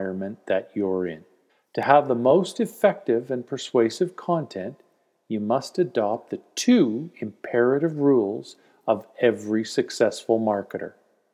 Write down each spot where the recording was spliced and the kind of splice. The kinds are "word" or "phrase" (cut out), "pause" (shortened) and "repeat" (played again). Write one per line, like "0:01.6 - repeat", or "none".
0:01.5 - pause

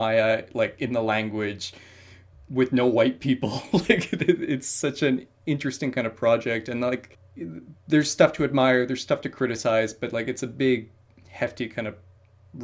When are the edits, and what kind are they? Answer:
none

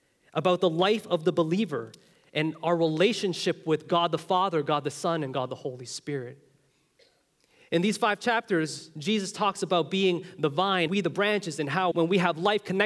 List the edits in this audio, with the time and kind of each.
0:10.9 - word
0:11.9 - word

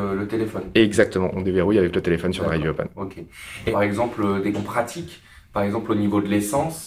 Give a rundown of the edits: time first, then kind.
0:03.7 - word
0:04.5 - word

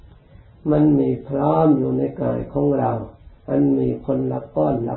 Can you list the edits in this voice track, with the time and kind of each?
0:03.4 - pause

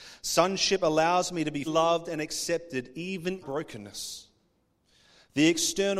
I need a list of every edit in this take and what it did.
0:01.7 - word
0:03.4 - phrase

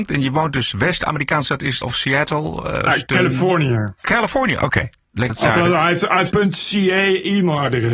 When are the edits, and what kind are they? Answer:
0:01.5 - word
0:01.8 - word
0:02.9 - word
0:05.3 - word
0:06.3 - word

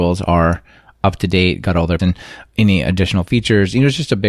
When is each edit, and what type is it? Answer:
0:02.0 - word

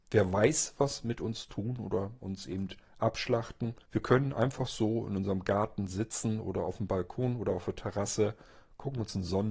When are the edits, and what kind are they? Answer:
0:03.8 - pause

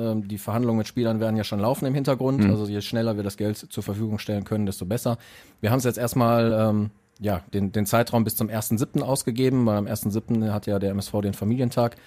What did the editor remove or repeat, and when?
none

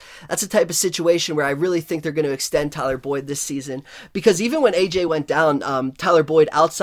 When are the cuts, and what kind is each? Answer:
none

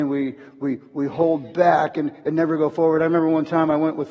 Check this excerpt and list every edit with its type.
none

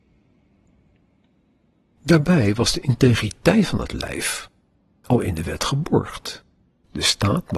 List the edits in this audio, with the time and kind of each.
none

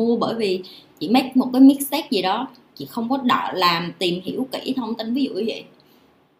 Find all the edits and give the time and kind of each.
none

